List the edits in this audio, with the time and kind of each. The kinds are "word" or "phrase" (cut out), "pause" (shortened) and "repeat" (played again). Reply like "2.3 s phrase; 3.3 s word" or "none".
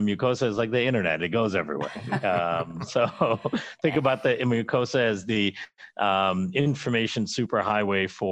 none